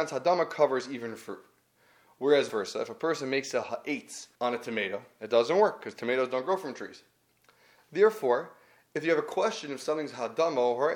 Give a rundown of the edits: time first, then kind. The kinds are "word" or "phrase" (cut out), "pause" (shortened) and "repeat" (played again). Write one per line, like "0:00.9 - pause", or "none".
0:02.5 - word
0:04.3 - pause